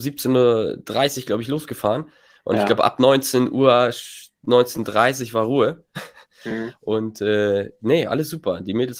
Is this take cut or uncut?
uncut